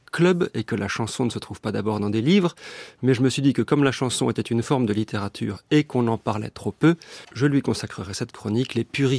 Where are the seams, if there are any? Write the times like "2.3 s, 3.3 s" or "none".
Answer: 7.2 s